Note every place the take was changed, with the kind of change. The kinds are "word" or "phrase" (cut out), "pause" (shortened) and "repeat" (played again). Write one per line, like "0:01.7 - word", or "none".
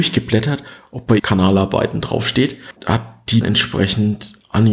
0:01.2 - word
0:02.8 - word
0:03.4 - word